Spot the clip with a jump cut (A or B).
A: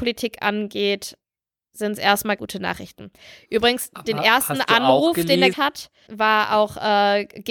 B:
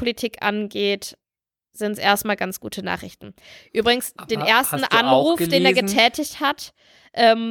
A